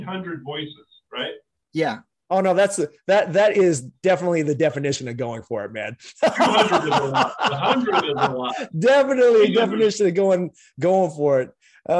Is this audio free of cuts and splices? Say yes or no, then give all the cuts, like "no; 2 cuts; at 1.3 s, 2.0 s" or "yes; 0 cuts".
yes; 0 cuts